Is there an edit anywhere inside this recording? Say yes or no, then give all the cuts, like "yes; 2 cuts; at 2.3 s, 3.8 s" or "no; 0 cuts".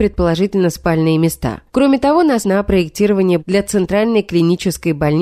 yes; 3 cuts; at 1.7 s, 2.4 s, 3.4 s